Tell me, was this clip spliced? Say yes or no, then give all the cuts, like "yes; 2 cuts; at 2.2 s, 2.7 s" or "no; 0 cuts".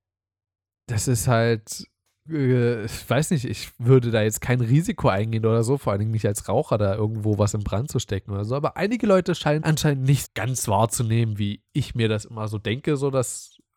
yes; 3 cuts; at 2.3 s, 9.6 s, 10.2 s